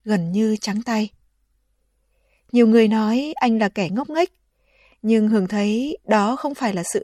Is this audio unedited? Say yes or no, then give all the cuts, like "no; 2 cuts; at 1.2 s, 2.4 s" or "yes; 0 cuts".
yes; 0 cuts